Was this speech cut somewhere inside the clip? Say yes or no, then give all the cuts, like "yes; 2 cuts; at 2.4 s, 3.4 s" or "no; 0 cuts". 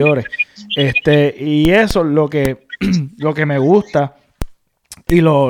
no; 0 cuts